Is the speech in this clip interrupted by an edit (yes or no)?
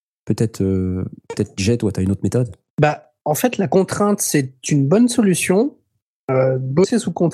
no